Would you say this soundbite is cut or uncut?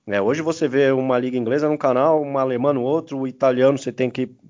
uncut